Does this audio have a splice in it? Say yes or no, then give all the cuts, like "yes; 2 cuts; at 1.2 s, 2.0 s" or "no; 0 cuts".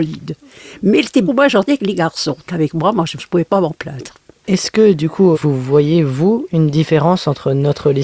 yes; 4 cuts; at 1.2 s, 2.4 s, 3.2 s, 5.3 s